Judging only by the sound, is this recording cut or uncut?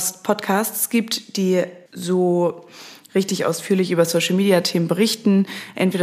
cut